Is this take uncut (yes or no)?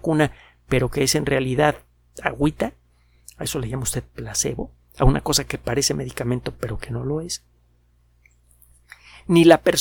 yes